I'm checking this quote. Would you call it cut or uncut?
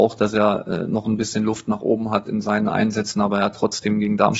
uncut